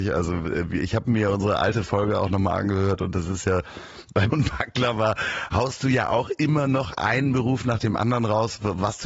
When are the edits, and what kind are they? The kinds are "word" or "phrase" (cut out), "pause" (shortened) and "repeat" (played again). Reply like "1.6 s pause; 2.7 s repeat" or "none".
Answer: 4.3 s word

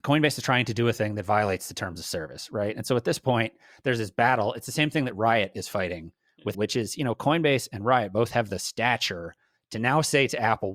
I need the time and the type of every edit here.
6.5 s word

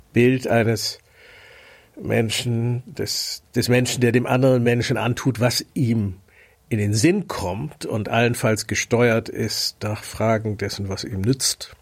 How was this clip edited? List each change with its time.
none

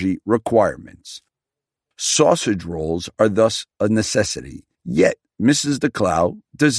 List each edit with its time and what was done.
3.7 s word

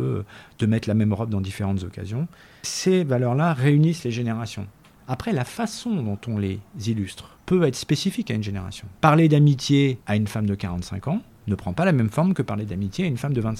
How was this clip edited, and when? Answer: 9.0 s pause; 10.0 s pause

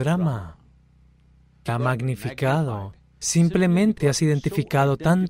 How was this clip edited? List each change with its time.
1.7 s word; 4.0 s word

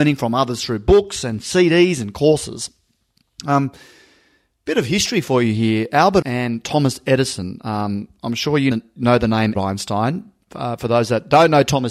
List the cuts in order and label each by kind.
6.2 s word; 8.7 s word; 9.5 s word

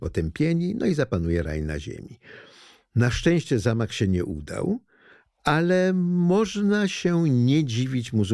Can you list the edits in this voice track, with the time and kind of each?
none

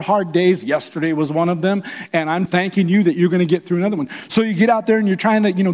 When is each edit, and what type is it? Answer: 2.5 s word

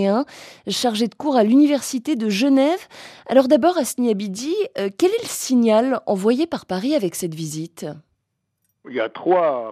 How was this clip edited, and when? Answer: none

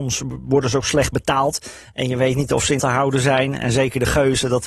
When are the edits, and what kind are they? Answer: 2.8 s word

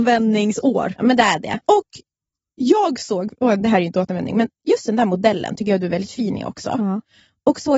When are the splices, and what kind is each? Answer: 1.6 s pause

